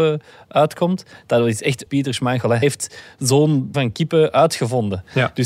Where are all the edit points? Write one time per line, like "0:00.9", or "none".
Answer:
0:01.9
0:02.6
0:03.7